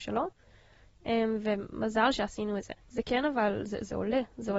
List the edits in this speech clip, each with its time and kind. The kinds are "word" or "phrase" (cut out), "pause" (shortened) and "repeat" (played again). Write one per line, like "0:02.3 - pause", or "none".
0:02.8 - pause